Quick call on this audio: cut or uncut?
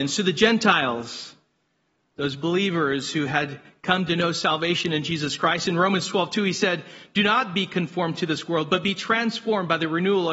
uncut